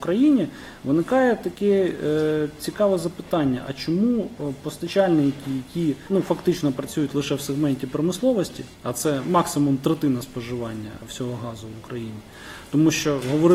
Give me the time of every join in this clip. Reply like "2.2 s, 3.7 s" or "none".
8.7 s